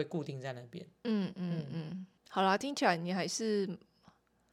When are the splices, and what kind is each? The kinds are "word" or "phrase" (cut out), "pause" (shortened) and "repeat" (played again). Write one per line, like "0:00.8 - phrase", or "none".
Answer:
0:02.2 - pause